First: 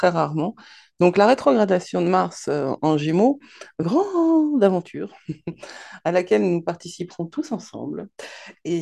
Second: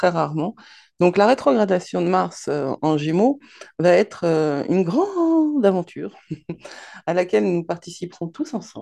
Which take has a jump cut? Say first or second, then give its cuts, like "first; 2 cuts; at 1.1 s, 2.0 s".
first; 1 cut; at 3.8 s